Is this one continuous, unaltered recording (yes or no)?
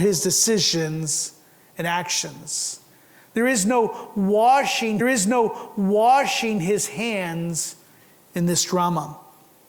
no